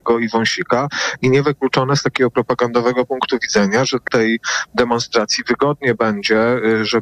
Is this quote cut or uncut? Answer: cut